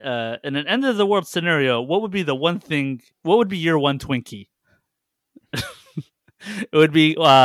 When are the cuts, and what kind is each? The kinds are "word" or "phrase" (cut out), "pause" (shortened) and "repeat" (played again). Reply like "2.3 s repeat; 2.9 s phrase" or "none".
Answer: 3.1 s pause; 4.5 s pause